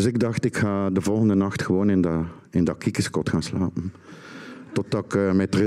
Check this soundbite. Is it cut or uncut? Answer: uncut